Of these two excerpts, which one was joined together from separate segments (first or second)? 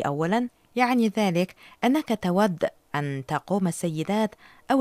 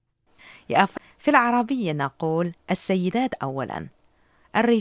second